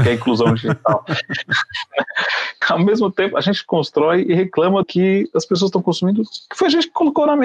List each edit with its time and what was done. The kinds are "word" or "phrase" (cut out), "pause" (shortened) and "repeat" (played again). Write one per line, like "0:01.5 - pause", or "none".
0:02.6 - word
0:04.8 - word